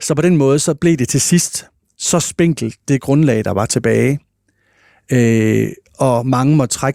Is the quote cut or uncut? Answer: uncut